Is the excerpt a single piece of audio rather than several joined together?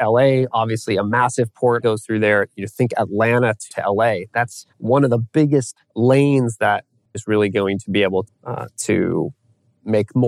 no; 6 cuts; at 1.8 s, 3.7 s, 4.7 s, 5.8 s, 7.1 s, 8.2 s

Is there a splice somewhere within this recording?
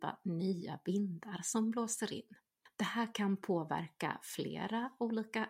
no; 0 cuts

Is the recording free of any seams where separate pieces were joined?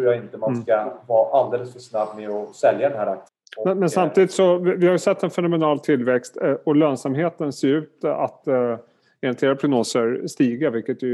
yes; 0 cuts

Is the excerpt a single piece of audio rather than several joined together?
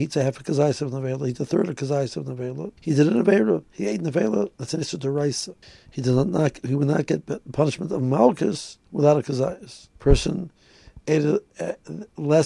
no; 4 cuts; at 2.8 s, 5.6 s, 8.9 s, 10.0 s

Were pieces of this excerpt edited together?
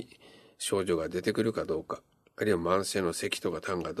no; 0 cuts

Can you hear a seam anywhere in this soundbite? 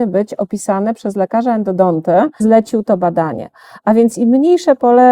yes; 1 cut; at 2.4 s

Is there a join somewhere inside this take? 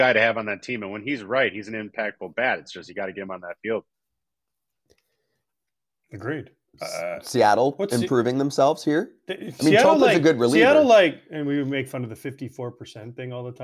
no; 0 cuts

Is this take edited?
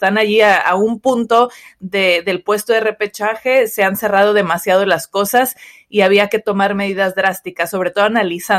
no; 0 cuts

